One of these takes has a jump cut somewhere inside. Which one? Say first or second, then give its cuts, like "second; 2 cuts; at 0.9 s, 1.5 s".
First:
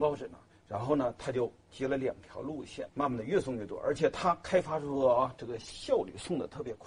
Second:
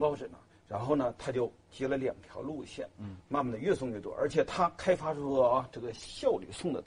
first; 1 cut; at 2.9 s